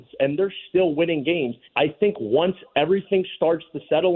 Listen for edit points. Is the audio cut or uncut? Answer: cut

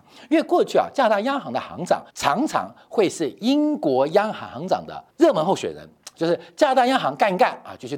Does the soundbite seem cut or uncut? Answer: cut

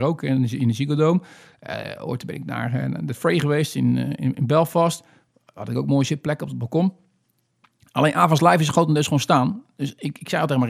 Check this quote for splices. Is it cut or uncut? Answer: uncut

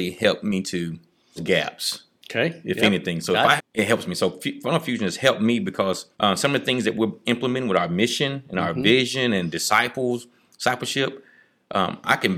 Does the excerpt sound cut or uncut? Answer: cut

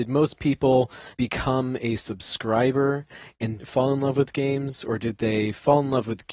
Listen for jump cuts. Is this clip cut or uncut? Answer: cut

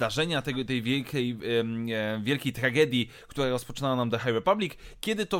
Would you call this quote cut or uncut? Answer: uncut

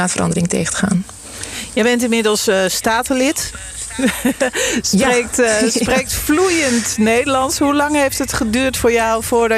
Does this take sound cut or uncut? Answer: uncut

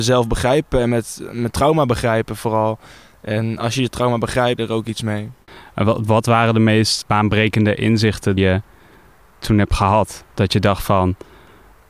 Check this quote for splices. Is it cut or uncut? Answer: cut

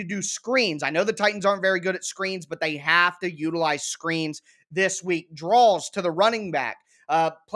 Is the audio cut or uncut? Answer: uncut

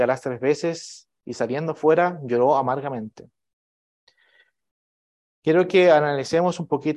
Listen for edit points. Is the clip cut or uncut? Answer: uncut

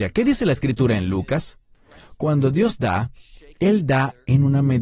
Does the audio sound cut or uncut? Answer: uncut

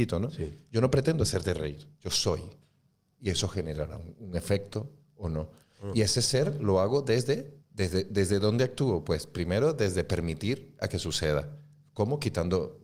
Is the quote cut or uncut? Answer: cut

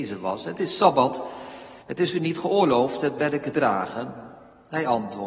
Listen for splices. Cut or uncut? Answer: cut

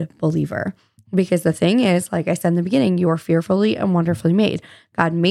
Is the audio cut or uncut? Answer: uncut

